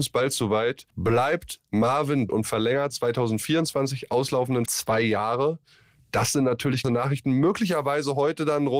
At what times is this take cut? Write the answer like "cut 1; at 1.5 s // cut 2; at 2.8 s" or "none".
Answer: cut 1; at 0.9 s // cut 2; at 2.3 s // cut 3; at 2.9 s // cut 4; at 4.7 s // cut 5; at 6.8 s

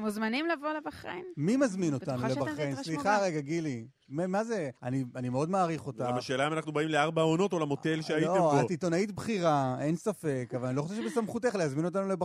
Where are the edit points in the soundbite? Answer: cut 1; at 4.8 s

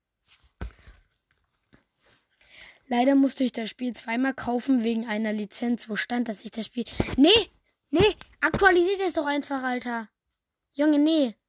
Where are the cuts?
none

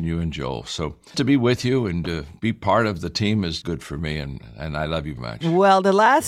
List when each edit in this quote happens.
cut 1; at 1.1 s // cut 2; at 3.6 s // cut 3; at 5.2 s

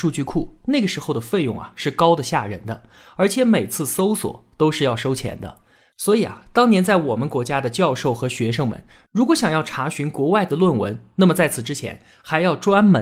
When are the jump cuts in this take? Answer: none

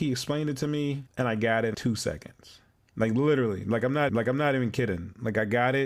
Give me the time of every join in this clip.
cut 1; at 1.1 s // cut 2; at 1.7 s // cut 3; at 2.8 s // cut 4; at 4.1 s

